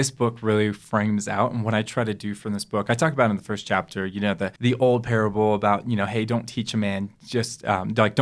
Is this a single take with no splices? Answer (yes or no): no